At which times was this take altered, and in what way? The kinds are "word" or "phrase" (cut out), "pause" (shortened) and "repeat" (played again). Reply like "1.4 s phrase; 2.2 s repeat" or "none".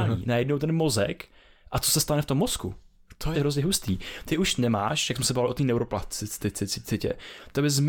3.3 s phrase